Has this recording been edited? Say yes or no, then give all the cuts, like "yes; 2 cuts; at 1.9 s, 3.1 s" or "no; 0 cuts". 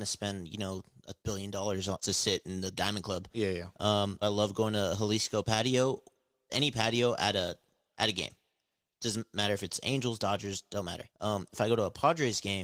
yes; 5 cuts; at 1.2 s, 2.0 s, 4.2 s, 6.5 s, 11.1 s